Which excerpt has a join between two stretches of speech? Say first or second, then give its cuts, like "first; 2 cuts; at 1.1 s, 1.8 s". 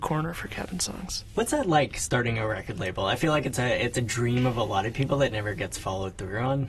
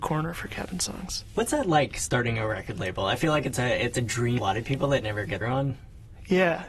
second; 2 cuts; at 4.4 s, 5.4 s